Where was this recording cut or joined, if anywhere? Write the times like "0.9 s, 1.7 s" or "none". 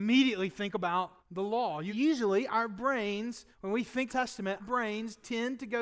1.2 s, 1.9 s, 3.5 s, 4.1 s, 4.6 s